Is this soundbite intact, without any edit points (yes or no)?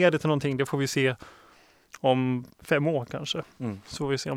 no